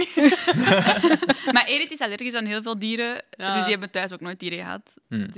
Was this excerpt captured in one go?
yes; 0 cuts

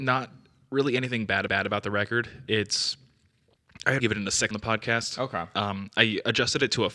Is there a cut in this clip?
yes; 3 cuts; at 1.5 s, 4.0 s, 4.5 s

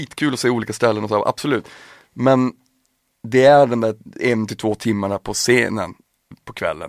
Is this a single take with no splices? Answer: yes; 0 cuts

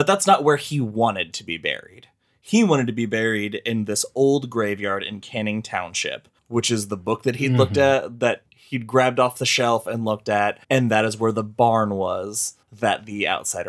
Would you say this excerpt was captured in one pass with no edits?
no; 4 cuts; at 6.4 s, 8.5 s, 10.6 s, 12.6 s

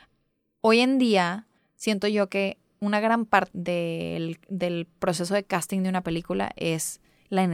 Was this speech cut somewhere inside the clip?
yes; 2 cuts; at 1.6 s, 3.5 s

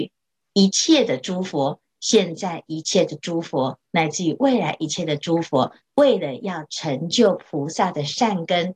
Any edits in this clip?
yes; 1 cut; at 5.8 s

